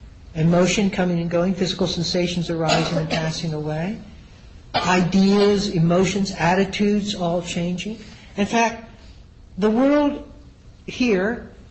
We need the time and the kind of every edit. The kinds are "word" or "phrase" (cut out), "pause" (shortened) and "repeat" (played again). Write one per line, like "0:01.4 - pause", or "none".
none